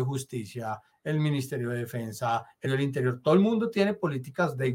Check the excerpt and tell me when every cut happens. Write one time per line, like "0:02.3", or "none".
0:02.6